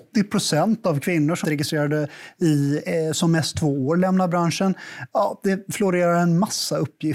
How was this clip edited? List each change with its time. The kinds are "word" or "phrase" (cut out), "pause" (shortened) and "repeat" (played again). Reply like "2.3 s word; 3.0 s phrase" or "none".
1.4 s word